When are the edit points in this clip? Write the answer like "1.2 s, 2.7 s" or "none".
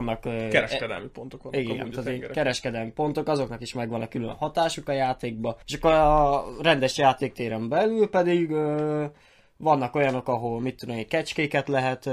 5.6 s